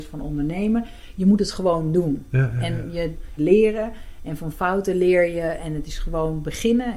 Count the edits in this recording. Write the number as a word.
one